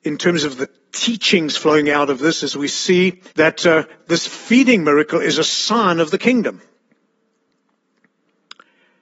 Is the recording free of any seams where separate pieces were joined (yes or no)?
no